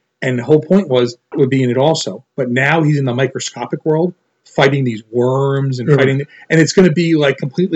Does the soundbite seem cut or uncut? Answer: cut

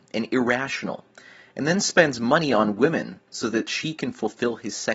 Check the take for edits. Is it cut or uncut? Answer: uncut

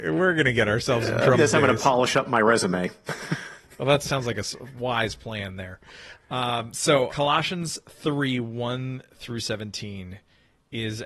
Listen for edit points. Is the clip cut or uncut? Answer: cut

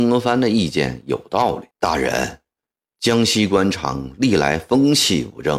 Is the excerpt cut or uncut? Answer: cut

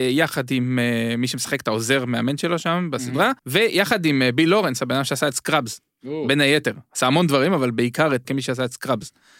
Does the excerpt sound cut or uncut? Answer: cut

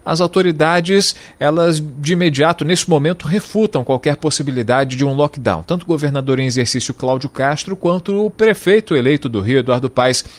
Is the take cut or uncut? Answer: uncut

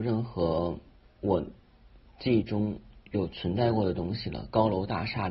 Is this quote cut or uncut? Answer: uncut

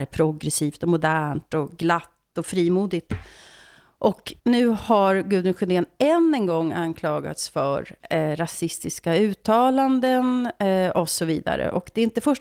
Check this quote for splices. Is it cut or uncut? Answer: cut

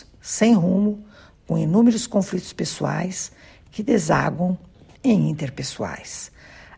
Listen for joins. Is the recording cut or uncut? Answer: uncut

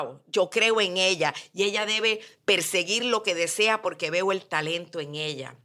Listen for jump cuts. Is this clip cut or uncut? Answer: uncut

